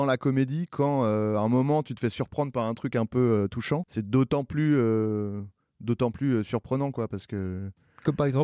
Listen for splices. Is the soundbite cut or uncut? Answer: uncut